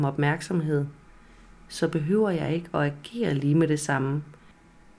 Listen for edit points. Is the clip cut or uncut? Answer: uncut